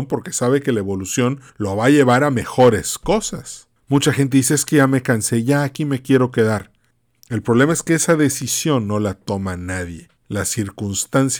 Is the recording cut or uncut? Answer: cut